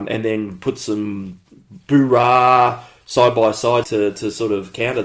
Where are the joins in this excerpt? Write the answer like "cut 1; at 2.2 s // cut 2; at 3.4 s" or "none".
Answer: cut 1; at 3.8 s